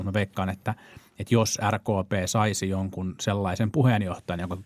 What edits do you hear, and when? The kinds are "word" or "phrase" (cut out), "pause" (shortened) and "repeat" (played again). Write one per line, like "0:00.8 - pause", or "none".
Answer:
none

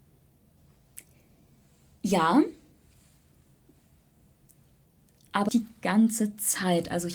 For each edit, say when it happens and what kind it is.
0:05.5 - word

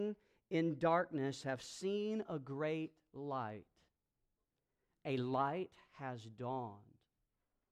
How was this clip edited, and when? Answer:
none

